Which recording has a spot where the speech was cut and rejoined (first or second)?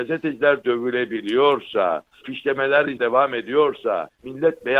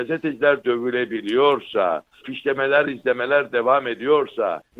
first